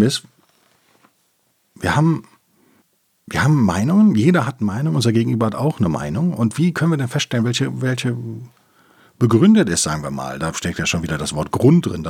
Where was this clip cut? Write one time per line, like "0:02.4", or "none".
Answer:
none